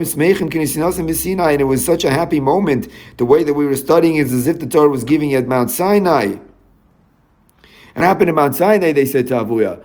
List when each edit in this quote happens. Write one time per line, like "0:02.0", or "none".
0:08.0